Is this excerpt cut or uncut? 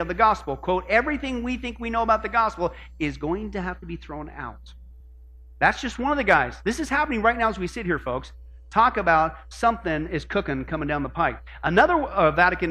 uncut